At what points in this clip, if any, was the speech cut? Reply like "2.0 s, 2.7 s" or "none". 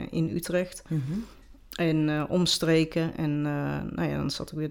none